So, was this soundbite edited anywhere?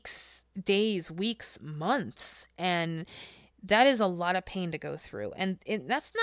no; 0 cuts

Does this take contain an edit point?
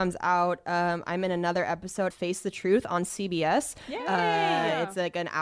yes; 1 cut; at 2.1 s

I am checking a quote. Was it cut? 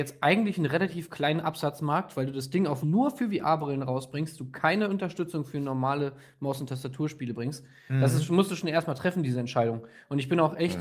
yes; 1 cut; at 2.8 s

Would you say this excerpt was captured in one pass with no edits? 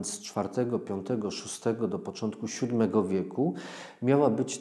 yes; 0 cuts

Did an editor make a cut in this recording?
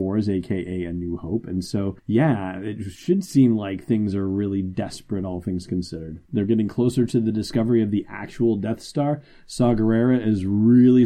yes; 2 cuts; at 2.0 s, 6.3 s

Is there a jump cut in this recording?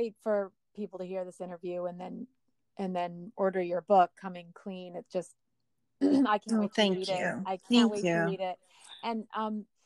no; 0 cuts

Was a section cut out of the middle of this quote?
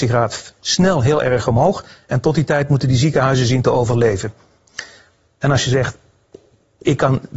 no; 0 cuts

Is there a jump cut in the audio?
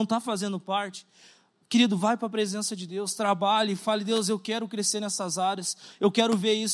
no; 0 cuts

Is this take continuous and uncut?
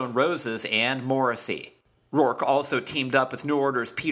yes; 0 cuts

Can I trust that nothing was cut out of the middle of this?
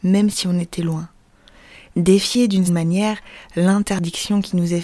no; 1 cut; at 2.7 s

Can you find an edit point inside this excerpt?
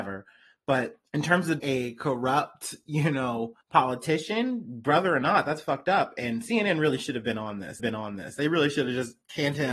yes; 4 cuts; at 1.1 s, 1.6 s, 3.6 s, 7.8 s

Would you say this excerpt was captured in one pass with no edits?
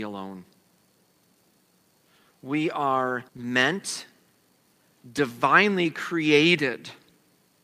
no; 1 cut; at 3.3 s

